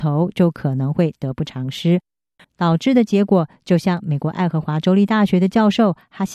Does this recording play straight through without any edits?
yes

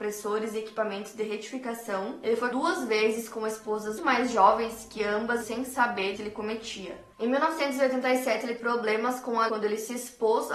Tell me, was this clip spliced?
yes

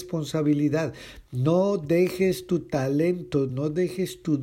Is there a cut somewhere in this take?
no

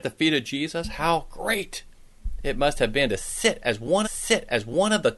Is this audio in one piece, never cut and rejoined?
no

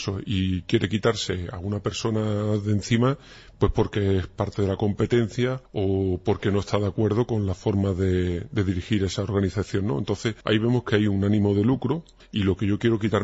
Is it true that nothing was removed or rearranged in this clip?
no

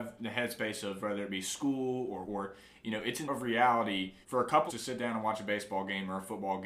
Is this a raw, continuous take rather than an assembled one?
no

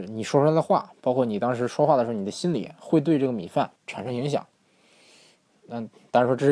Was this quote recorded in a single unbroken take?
no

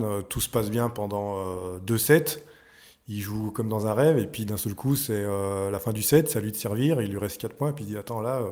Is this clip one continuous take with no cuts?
yes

